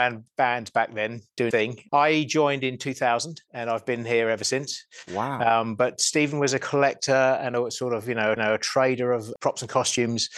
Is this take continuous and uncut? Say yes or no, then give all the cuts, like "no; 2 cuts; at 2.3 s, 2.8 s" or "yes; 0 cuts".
no; 3 cuts; at 1.5 s, 3.5 s, 8.4 s